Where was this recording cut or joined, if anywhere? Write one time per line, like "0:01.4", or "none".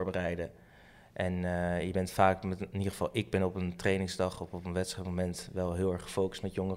none